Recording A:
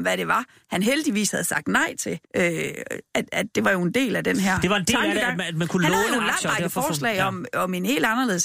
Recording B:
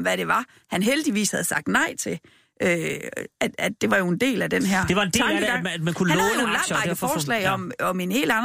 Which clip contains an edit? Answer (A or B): A